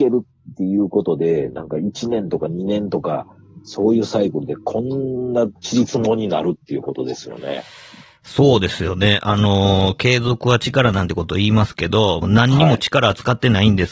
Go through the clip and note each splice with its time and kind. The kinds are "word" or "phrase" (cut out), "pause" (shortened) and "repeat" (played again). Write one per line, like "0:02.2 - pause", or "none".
0:05.6 - pause
0:12.2 - phrase

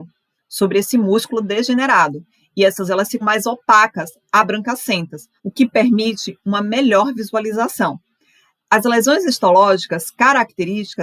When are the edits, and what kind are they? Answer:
0:02.9 - word
0:03.2 - word
0:05.4 - pause

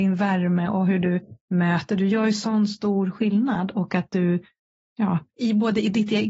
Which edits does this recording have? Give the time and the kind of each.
0:04.8 - pause

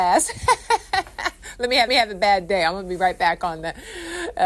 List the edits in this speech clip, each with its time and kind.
0:01.9 - repeat

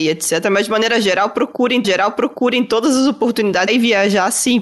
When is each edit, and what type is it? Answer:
0:01.8 - repeat
0:03.7 - phrase

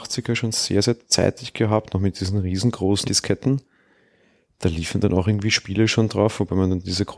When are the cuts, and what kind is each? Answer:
0:03.0 - word

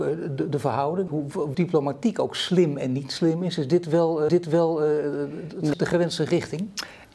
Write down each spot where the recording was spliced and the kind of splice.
0:01.1 - phrase
0:01.5 - word
0:04.3 - repeat
0:05.7 - word

